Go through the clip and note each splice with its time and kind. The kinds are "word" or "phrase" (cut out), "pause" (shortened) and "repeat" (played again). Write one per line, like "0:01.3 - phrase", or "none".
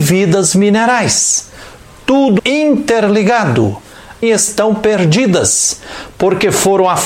0:02.4 - word
0:04.2 - phrase